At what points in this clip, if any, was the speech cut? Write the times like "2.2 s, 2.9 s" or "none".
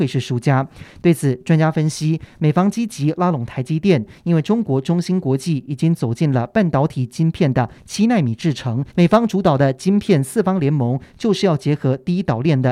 8.9 s